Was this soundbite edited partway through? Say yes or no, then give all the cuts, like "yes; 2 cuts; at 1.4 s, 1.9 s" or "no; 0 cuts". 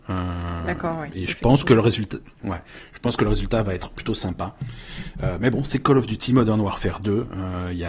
yes; 1 cut; at 2.4 s